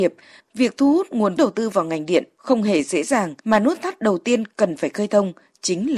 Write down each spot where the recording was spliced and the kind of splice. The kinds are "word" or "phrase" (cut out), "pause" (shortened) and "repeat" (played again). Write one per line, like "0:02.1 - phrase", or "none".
0:01.4 - word
0:03.4 - pause